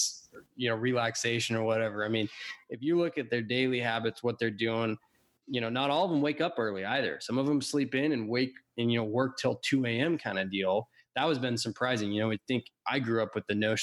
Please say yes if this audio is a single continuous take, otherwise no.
yes